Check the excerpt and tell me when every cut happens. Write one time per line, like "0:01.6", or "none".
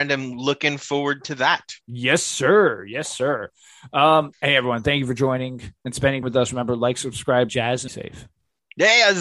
0:01.8
0:04.3
0:06.2
0:07.5
0:07.9

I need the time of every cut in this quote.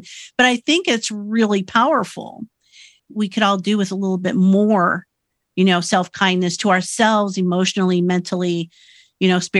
none

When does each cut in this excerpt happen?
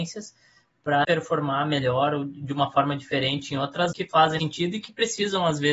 0:01.0
0:03.9
0:04.4

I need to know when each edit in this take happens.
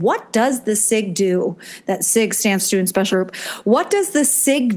0:02.6
0:03.1

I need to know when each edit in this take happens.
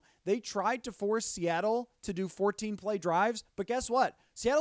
none

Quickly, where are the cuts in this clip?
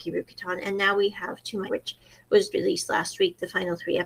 0:01.7
0:02.5

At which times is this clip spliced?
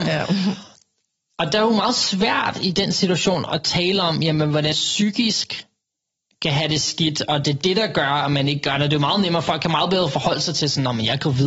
0:04.7

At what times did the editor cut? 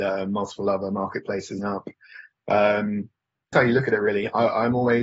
0:01.6
0:03.5

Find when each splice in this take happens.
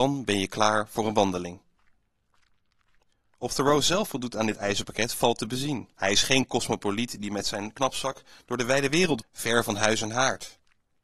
0:05.9
0:09.2

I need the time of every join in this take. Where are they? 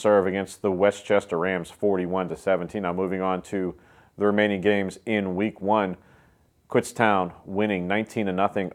none

